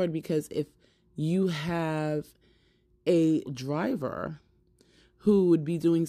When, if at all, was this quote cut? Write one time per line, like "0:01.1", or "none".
0:03.4